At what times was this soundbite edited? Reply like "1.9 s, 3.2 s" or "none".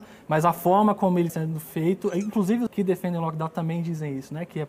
1.3 s, 2.7 s